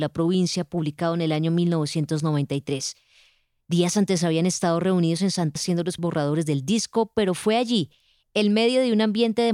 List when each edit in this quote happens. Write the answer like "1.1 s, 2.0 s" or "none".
5.6 s, 6.0 s